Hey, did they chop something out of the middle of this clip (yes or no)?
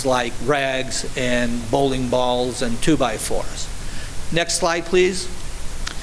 no